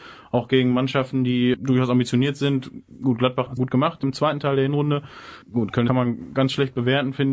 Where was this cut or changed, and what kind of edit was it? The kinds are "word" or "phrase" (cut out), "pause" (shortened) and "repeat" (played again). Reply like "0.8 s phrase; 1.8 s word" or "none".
3.6 s word; 5.4 s pause; 5.9 s phrase